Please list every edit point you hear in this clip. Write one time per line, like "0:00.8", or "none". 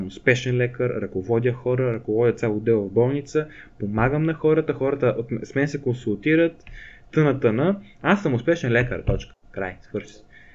0:09.4